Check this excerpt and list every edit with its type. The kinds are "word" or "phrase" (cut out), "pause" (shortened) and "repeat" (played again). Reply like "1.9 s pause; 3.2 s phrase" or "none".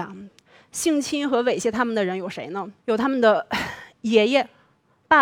2.8 s pause